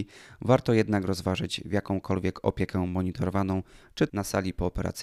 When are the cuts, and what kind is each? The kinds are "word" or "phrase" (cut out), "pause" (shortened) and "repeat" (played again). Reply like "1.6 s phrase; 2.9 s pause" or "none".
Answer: 4.1 s word